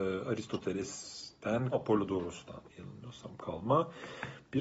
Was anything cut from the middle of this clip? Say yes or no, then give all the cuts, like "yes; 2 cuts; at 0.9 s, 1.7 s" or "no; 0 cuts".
yes; 2 cuts; at 1.7 s, 2.7 s